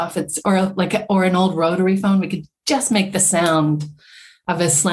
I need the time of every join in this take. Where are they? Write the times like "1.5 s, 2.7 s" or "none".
none